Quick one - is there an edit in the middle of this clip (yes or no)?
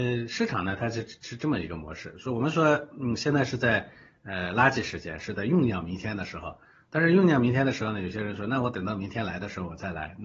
no